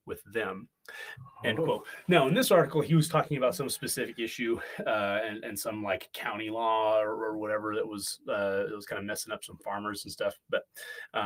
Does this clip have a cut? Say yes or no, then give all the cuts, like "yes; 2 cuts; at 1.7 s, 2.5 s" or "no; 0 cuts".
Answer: no; 0 cuts